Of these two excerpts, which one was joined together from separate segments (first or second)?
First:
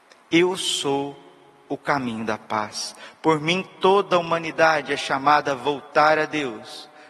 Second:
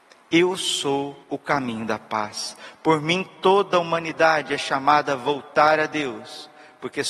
second